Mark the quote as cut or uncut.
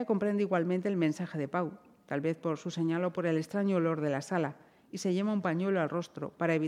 uncut